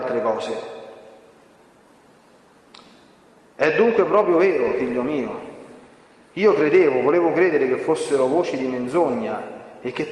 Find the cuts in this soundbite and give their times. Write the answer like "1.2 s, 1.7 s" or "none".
none